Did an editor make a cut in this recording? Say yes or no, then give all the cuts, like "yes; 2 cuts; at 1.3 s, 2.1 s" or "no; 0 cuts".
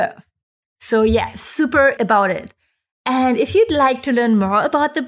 yes; 1 cut; at 2.0 s